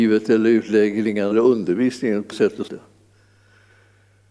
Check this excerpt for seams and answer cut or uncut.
cut